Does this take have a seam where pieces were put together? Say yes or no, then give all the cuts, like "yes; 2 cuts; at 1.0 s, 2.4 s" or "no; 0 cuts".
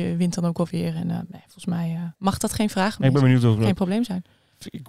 yes; 1 cut; at 2.2 s